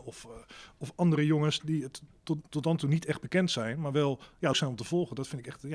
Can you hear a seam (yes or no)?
yes